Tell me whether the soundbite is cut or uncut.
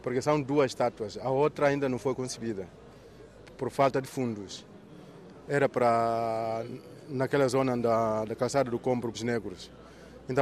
cut